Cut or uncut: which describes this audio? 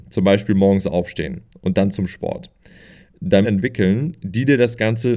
cut